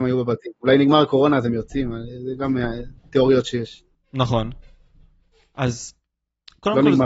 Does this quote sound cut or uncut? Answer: uncut